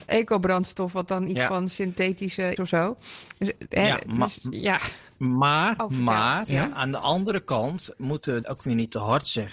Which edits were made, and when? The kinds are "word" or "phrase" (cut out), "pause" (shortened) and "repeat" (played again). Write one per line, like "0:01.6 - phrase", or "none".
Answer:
0:02.6 - phrase
0:08.4 - word